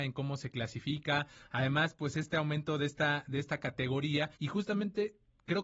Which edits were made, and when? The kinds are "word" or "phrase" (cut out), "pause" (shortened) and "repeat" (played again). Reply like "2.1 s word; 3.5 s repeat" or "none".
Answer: 4.4 s pause

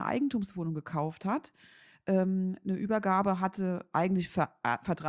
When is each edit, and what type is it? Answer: none

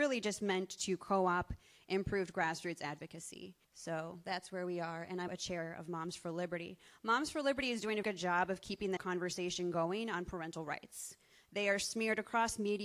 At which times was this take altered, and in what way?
3.6 s pause; 5.3 s word; 8.0 s word; 9.0 s word

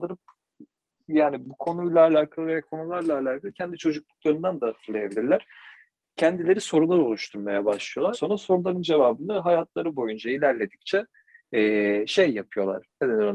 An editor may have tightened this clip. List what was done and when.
8.1 s phrase

